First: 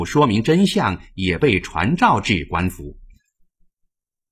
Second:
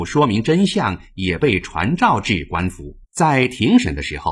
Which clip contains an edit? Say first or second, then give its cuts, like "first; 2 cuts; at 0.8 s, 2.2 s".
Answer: second; 1 cut; at 3.0 s